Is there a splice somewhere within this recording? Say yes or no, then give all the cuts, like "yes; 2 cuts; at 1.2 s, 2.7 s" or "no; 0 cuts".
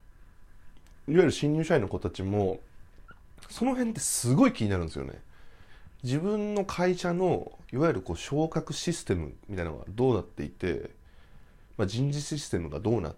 no; 0 cuts